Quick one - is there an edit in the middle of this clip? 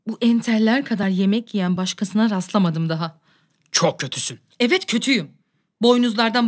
no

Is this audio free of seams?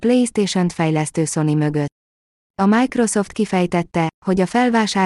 yes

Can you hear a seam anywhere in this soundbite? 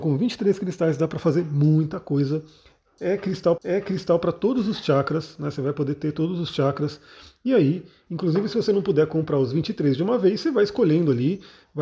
yes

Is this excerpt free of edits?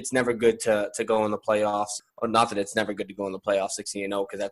yes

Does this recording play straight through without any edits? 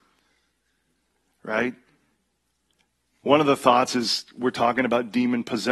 yes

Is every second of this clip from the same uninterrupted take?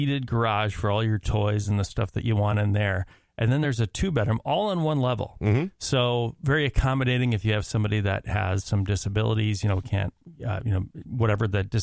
yes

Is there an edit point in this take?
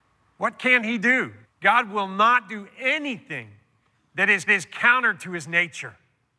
yes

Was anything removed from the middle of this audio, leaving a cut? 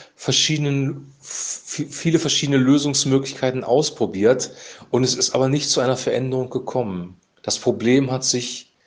yes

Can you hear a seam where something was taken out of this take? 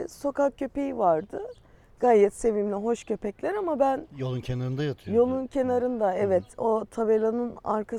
no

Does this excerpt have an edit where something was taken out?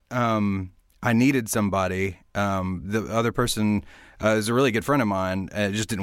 no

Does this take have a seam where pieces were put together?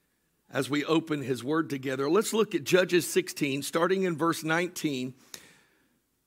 no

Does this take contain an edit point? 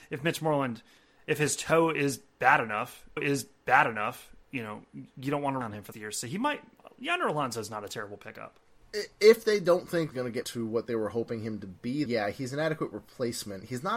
yes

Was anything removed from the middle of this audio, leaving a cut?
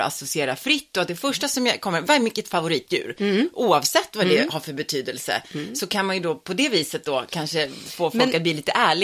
no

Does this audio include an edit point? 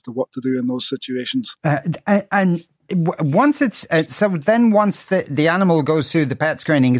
yes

